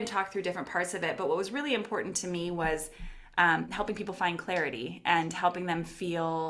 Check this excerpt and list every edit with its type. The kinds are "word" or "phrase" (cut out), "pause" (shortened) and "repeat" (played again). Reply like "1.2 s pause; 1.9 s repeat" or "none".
none

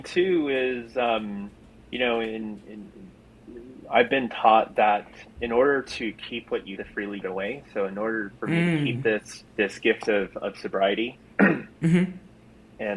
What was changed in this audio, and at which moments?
1.6 s pause; 6.8 s phrase; 7.2 s phrase; 9.5 s pause

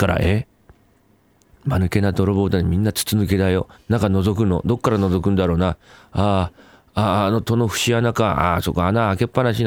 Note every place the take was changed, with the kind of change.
3.7 s pause

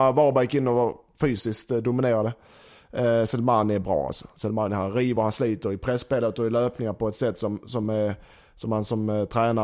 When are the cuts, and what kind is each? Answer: none

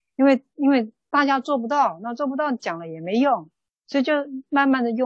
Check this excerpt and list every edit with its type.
none

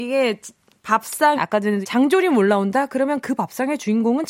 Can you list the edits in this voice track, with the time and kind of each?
1.4 s phrase; 1.8 s word

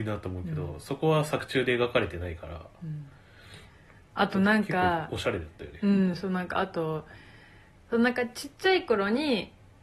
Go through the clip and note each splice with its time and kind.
none

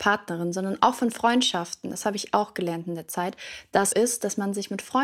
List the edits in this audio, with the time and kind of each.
3.9 s phrase

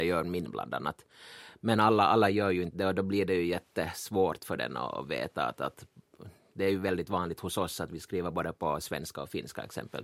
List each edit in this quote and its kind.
none

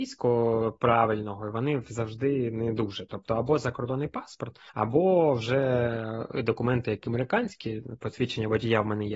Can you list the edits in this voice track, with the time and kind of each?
4.7 s pause

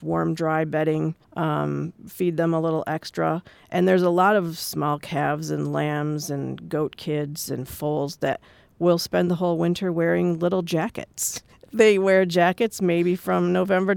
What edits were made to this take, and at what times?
1.2 s pause; 11.5 s pause

